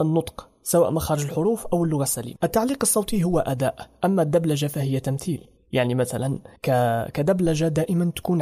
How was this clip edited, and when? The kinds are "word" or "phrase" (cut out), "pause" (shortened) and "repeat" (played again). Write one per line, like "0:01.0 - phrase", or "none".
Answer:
0:06.6 - pause

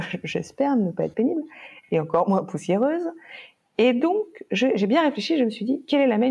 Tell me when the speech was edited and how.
none

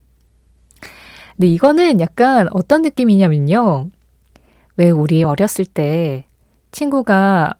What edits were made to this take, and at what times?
none

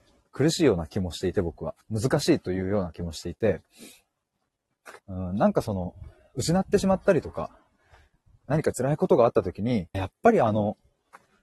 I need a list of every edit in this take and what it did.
0:01.8 - pause
0:05.0 - pause
0:09.9 - word

